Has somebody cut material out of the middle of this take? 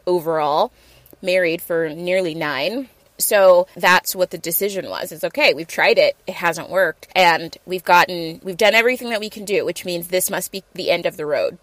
yes; 1 cut; at 7.1 s

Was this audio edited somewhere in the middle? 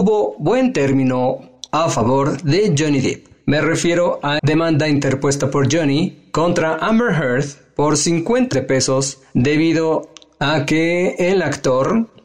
yes; 2 cuts; at 4.4 s, 8.5 s

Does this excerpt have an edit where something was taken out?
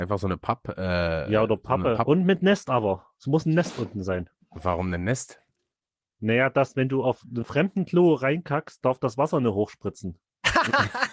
no; 0 cuts

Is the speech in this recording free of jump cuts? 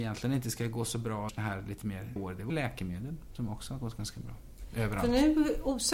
no; 3 cuts; at 1.3 s, 2.2 s, 2.5 s

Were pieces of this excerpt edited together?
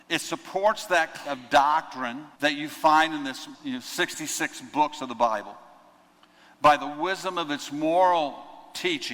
yes; 3 cuts; at 1.3 s, 2.3 s, 3.5 s

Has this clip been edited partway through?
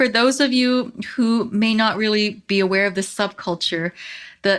no; 0 cuts

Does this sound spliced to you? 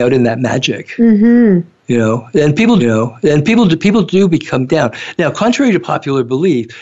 yes; 2 cuts; at 2.8 s, 4.7 s

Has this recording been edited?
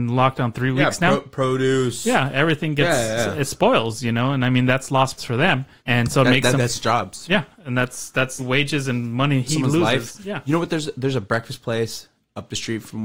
yes; 4 cuts; at 5.2 s, 5.8 s, 6.6 s, 8.4 s

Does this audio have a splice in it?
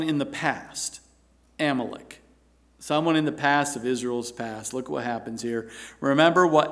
no; 0 cuts

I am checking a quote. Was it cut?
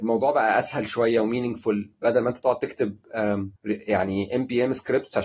yes; 1 cut; at 3.6 s

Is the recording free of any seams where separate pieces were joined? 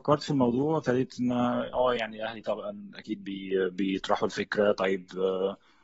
yes; 0 cuts

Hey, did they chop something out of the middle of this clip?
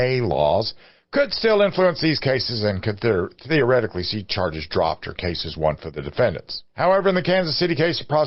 yes; 1 cut; at 6.7 s

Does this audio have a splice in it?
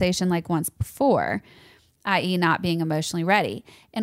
no; 0 cuts

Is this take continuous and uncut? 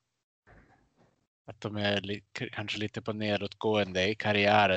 yes; 0 cuts

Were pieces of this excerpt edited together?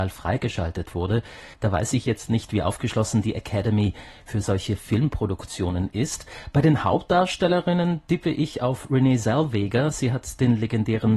yes; 1 cut; at 1.5 s

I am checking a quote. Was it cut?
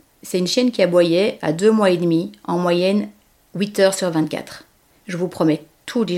no; 0 cuts

